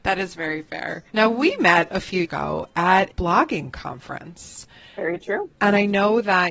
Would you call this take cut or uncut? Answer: cut